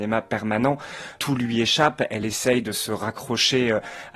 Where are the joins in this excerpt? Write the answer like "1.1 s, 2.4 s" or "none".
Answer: none